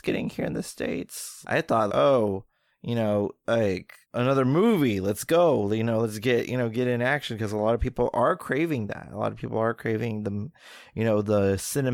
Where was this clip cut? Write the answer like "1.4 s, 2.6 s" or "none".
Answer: 1.4 s, 1.9 s, 4.0 s